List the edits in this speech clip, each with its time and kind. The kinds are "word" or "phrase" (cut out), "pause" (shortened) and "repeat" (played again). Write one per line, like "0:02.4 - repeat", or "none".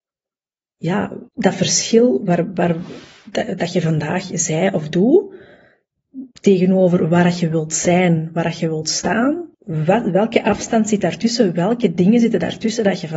0:01.3 - pause
0:06.3 - pause
0:09.5 - pause